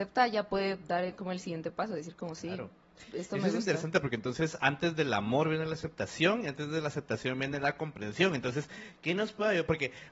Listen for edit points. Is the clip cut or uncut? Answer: uncut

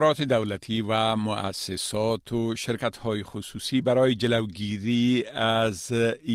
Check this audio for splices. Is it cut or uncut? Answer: uncut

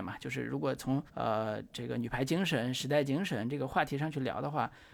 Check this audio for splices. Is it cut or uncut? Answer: cut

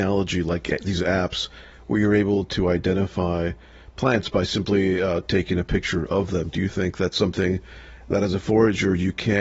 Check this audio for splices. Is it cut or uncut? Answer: uncut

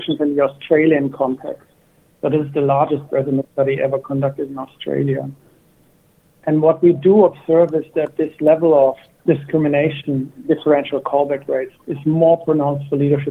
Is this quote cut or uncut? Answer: uncut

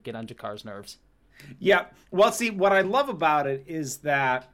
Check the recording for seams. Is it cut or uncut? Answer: uncut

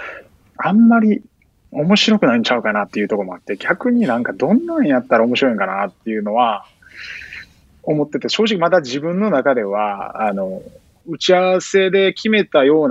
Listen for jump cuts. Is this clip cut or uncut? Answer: uncut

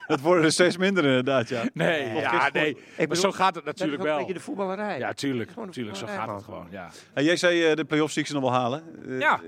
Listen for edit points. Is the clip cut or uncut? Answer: uncut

